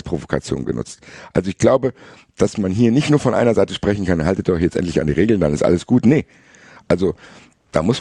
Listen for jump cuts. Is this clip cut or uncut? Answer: uncut